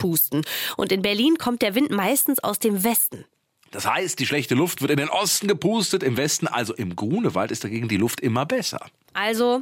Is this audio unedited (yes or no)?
yes